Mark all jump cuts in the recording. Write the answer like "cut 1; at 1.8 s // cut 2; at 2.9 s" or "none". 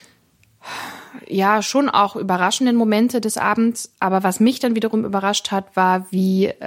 none